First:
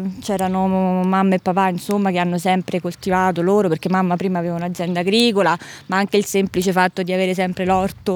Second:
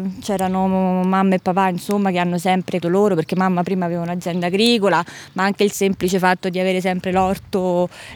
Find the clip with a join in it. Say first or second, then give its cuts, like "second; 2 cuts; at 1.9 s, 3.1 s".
second; 1 cut; at 2.8 s